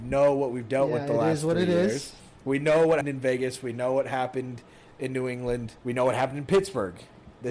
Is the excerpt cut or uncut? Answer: cut